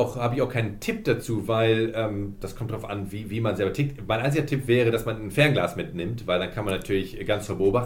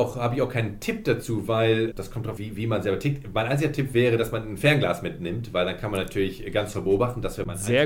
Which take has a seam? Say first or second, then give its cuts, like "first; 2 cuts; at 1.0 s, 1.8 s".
second; 2 cuts; at 1.9 s, 2.4 s